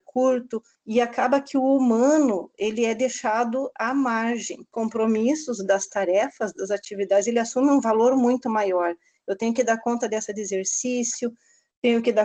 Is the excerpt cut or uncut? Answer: cut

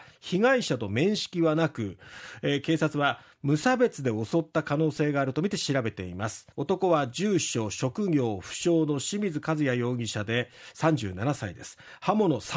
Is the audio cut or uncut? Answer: cut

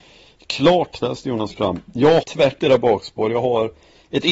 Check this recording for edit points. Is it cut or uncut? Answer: cut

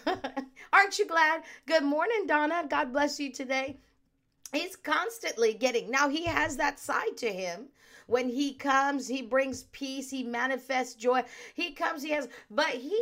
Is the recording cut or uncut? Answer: uncut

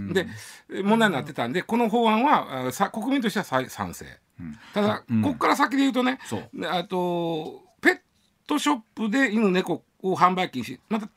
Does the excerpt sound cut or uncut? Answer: uncut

